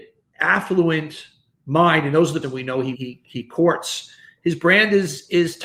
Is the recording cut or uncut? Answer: cut